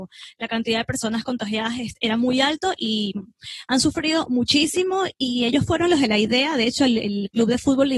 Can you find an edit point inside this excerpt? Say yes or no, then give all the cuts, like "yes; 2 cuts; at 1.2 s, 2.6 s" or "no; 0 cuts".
no; 0 cuts